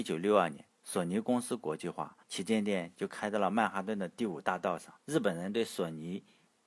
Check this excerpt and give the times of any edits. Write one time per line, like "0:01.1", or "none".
0:02.2
0:05.0